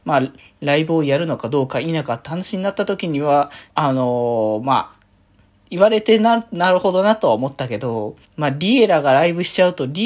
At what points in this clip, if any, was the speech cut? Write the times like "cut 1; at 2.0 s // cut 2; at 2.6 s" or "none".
cut 1; at 3.7 s // cut 2; at 8.3 s